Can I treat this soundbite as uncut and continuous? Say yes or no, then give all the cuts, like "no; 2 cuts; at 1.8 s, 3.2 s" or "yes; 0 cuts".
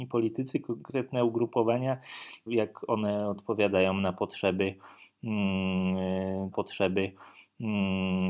no; 2 cuts; at 2.5 s, 6.5 s